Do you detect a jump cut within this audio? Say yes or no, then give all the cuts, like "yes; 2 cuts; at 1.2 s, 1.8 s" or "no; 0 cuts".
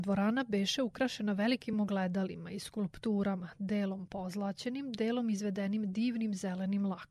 no; 0 cuts